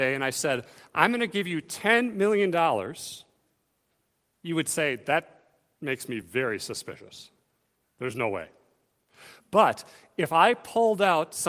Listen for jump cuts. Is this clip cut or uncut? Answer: uncut